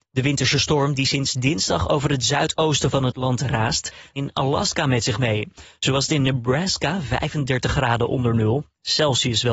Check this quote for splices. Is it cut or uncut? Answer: cut